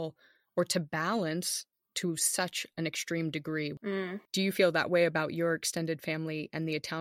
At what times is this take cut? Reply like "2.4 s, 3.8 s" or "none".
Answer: 1.8 s